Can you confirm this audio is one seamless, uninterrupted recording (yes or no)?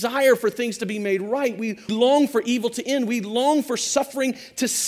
no